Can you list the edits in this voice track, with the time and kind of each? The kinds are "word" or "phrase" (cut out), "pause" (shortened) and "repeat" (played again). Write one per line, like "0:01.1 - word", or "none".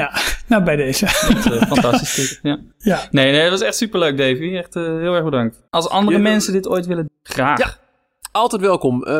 0:05.7 - pause
0:07.1 - word